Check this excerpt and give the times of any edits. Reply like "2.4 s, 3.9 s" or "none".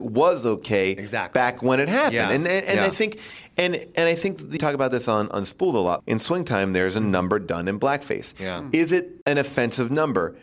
4.6 s, 6.0 s, 9.2 s